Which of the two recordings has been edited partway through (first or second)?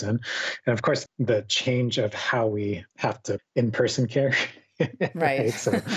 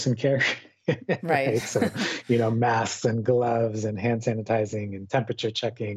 first